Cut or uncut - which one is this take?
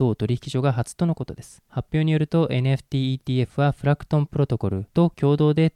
uncut